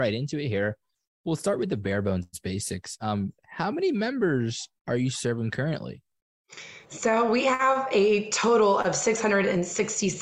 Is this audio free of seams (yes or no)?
no